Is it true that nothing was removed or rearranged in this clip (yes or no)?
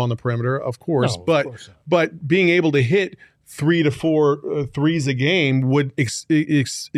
yes